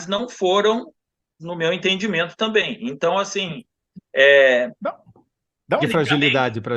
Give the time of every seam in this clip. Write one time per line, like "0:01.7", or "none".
0:01.4
0:05.8